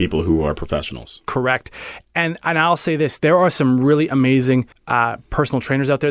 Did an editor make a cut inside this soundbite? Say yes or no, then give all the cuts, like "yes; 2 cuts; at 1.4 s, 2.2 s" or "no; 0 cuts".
yes; 1 cut; at 4.7 s